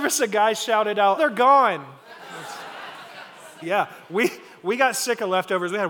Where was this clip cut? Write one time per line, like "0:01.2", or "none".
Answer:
0:01.2
0:03.6